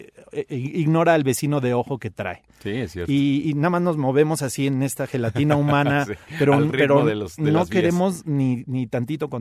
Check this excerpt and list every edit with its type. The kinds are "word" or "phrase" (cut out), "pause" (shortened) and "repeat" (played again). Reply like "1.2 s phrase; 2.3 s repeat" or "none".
none